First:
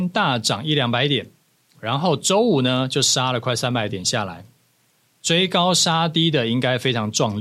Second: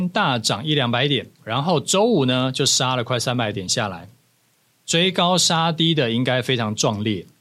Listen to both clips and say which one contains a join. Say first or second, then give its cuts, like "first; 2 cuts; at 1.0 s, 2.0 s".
second; 1 cut; at 1.4 s